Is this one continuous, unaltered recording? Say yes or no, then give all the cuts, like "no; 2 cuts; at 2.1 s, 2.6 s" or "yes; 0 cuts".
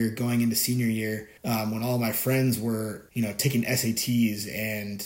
no; 2 cuts; at 1.4 s, 3.1 s